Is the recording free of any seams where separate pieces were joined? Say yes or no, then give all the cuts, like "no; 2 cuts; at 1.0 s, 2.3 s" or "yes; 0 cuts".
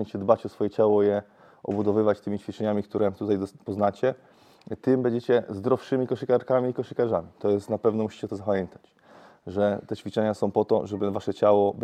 yes; 0 cuts